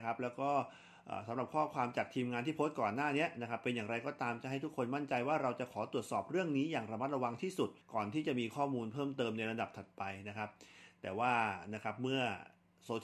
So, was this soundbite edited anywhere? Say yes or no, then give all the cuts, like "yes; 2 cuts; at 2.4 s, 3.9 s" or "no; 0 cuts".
yes; 1 cut; at 7.8 s